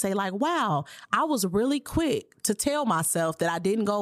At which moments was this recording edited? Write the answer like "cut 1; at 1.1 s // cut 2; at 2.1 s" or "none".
none